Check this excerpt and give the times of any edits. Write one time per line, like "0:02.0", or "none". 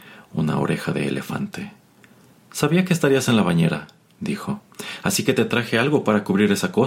none